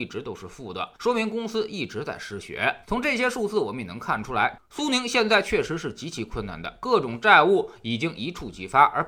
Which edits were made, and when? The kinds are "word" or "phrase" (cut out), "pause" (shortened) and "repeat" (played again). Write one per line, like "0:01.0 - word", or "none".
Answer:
0:00.9 - pause
0:02.8 - pause